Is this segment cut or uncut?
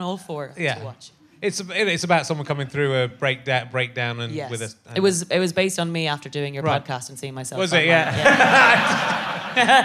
uncut